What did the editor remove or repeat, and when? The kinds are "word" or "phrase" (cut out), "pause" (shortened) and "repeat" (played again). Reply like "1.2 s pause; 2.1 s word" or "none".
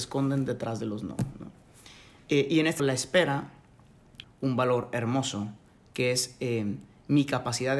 2.8 s word; 4.2 s word